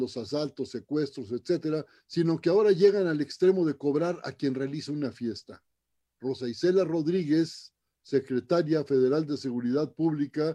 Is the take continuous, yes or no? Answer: yes